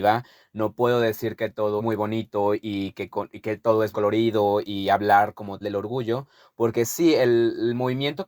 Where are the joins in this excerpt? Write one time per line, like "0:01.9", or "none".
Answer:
0:01.8
0:03.9
0:05.6